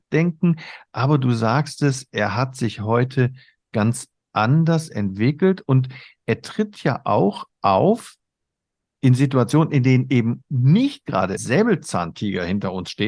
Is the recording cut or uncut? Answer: cut